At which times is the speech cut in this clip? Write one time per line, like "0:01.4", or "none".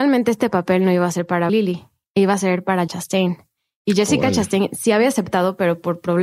0:01.5
0:02.9

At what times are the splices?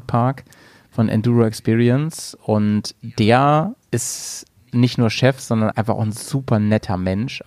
0:03.8
0:05.7

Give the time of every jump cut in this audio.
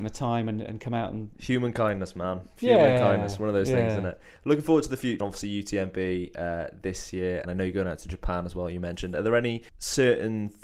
0:05.2
0:07.5
0:09.7

